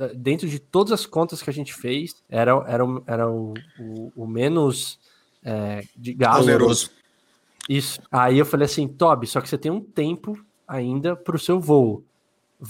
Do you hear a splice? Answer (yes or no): yes